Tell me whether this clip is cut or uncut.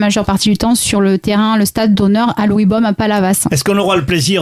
uncut